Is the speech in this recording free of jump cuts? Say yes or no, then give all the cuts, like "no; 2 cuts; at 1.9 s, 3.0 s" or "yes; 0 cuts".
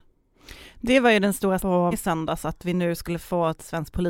no; 2 cuts; at 1.6 s, 1.9 s